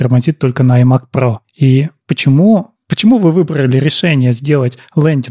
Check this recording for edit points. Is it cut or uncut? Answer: uncut